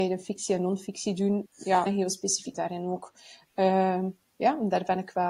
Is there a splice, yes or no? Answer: yes